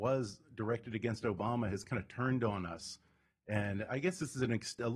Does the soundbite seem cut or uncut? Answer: uncut